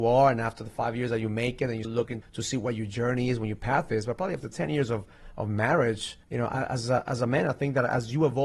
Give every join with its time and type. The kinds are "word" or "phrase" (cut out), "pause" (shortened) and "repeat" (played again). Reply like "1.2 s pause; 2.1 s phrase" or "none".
1.8 s word; 2.2 s word; 6.2 s pause